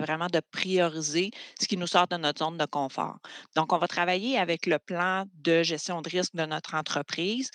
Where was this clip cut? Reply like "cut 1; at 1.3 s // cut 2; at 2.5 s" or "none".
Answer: none

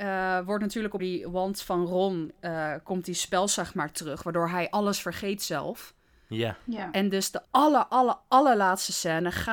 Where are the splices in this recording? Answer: cut 1; at 1.0 s // cut 2; at 7.4 s

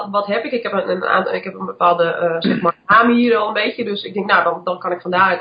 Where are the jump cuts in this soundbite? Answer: none

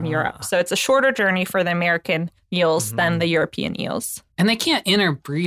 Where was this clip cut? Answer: cut 1; at 2.4 s // cut 2; at 4.3 s

